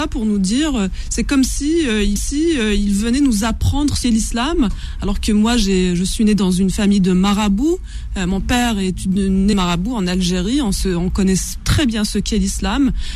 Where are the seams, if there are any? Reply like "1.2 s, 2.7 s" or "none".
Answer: 2.2 s, 4.0 s, 9.5 s

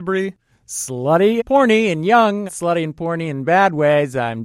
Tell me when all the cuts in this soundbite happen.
1.4 s, 2.5 s

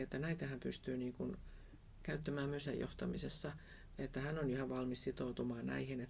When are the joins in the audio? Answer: 2.7 s

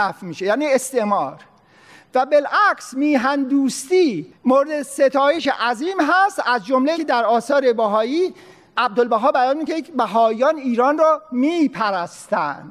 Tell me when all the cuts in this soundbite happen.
4.3 s, 6.9 s

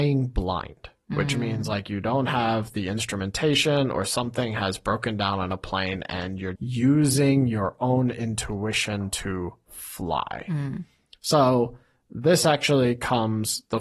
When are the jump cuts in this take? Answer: 6.6 s

